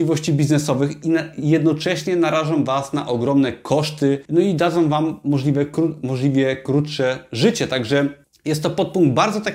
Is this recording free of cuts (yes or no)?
no